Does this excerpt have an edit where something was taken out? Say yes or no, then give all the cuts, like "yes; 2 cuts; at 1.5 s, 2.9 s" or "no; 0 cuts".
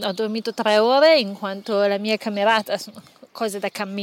no; 0 cuts